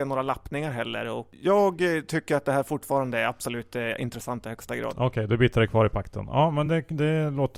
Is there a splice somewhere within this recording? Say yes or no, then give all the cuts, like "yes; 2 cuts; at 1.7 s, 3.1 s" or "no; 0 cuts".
no; 0 cuts